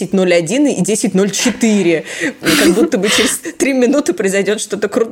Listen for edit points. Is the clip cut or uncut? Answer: uncut